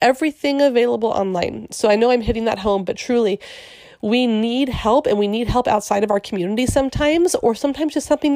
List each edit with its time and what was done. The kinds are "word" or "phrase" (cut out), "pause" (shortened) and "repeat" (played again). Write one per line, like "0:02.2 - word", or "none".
none